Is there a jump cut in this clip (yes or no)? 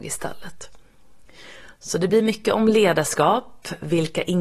no